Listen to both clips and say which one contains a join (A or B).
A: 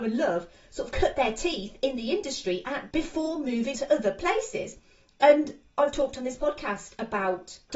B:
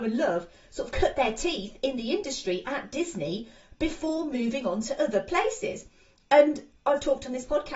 A